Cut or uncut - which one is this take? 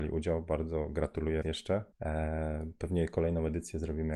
cut